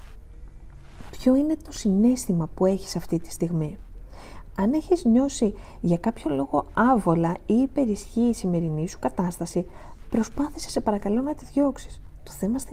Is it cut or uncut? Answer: uncut